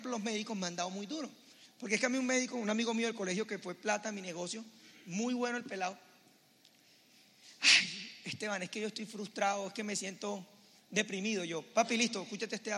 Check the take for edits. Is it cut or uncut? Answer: uncut